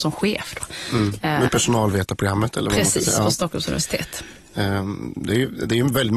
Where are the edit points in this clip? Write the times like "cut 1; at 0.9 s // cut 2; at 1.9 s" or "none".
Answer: cut 1; at 1.5 s